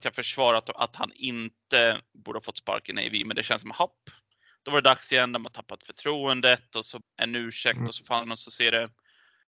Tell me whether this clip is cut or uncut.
cut